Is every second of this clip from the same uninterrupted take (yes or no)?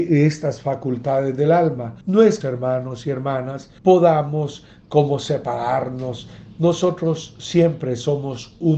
no